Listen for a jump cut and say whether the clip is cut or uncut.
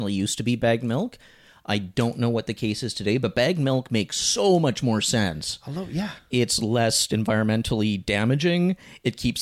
uncut